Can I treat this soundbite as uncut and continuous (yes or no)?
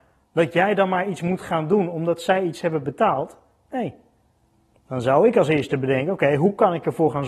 yes